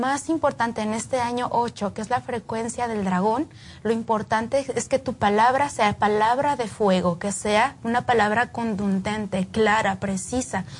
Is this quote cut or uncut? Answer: uncut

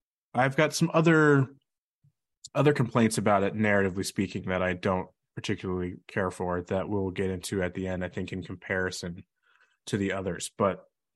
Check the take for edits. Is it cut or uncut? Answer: uncut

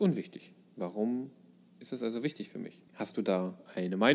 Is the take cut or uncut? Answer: cut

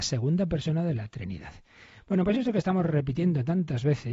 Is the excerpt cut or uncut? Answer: uncut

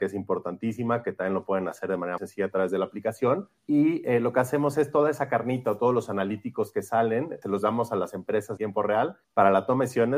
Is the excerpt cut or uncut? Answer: cut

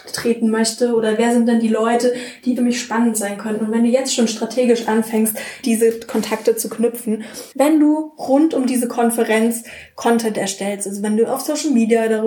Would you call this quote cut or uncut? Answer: cut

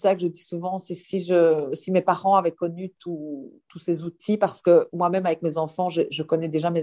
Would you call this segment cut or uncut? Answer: uncut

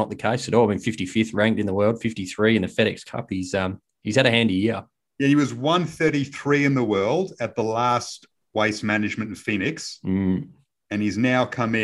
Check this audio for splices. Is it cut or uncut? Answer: uncut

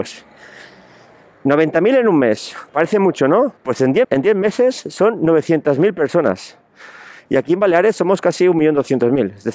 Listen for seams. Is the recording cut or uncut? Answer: cut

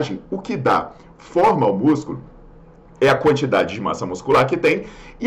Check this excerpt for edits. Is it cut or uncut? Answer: uncut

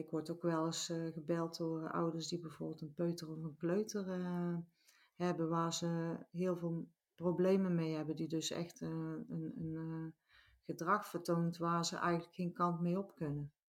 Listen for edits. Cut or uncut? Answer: uncut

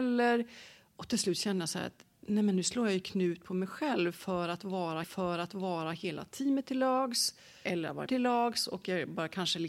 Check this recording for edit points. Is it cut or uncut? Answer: cut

